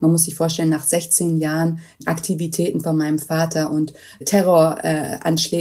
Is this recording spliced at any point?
no; 0 cuts

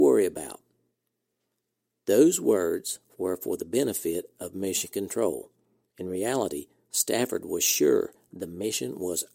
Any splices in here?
no; 0 cuts

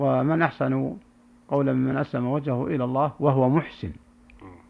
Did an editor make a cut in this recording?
no; 0 cuts

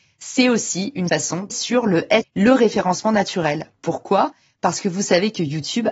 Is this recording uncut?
no; 3 cuts; at 1.1 s, 1.5 s, 2.2 s

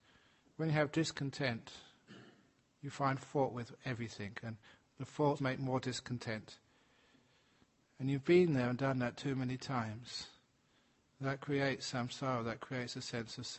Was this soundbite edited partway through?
yes; 1 cut; at 5.4 s

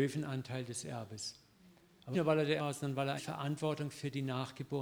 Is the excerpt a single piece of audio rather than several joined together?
no; 3 cuts; at 2.1 s, 2.6 s, 3.2 s

